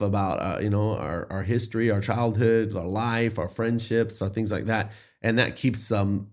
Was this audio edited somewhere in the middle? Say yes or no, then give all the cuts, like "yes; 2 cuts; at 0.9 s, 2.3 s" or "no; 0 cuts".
no; 0 cuts